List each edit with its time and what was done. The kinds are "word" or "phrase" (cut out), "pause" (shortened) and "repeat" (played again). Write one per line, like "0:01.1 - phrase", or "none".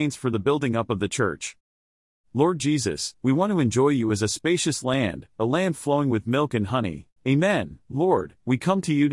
0:07.2 - pause